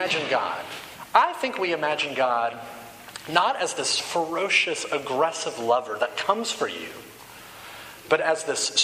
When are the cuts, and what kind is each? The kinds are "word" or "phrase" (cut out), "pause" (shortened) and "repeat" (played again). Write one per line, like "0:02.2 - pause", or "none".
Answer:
none